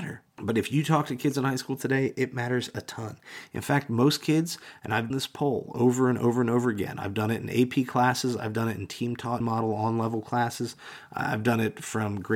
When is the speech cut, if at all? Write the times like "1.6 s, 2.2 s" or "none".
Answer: 5.1 s, 9.4 s